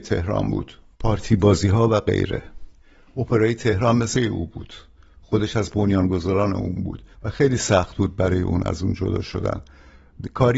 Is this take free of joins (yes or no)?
no